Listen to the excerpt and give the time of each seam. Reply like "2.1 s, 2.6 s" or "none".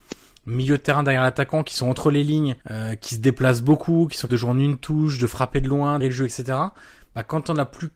2.6 s, 4.3 s, 6.0 s